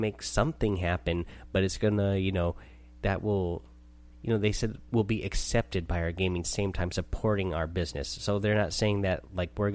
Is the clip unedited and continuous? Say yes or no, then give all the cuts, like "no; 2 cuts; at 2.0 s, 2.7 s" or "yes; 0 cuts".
no; 1 cut; at 6.4 s